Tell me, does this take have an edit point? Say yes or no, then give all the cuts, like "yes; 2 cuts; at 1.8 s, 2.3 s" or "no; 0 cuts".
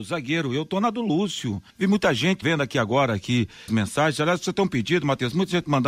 yes; 3 cuts; at 1.7 s, 2.4 s, 3.7 s